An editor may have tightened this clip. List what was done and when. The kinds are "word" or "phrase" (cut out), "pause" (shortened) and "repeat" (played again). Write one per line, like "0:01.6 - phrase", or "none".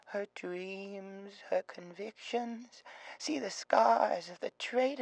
none